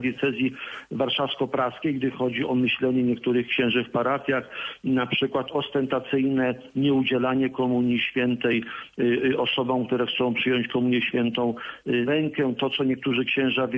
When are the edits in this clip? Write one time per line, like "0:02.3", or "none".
0:12.1